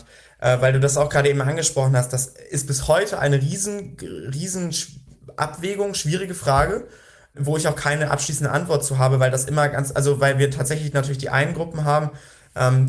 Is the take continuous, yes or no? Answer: yes